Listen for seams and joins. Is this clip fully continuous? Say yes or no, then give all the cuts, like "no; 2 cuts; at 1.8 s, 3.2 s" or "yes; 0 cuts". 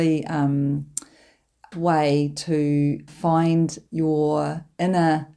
no; 2 cuts; at 1.7 s, 3.1 s